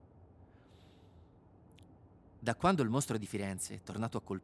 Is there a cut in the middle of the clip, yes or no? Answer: no